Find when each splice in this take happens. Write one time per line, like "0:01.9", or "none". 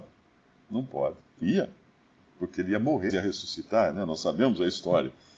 0:01.4
0:03.1